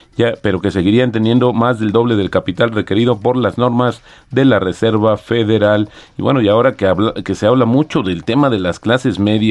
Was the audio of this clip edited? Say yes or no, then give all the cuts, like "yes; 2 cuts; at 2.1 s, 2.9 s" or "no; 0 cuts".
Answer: no; 0 cuts